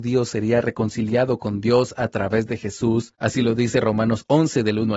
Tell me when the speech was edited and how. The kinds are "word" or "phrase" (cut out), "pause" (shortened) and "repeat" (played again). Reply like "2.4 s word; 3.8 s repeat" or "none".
none